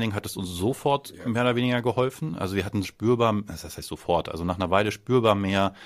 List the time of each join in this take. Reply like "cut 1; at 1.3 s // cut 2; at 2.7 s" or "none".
cut 1; at 2.8 s